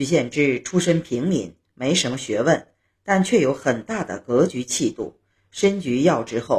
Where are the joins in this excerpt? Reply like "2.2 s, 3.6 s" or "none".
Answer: none